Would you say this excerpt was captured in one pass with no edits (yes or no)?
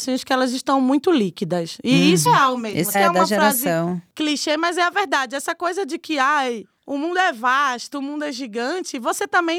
no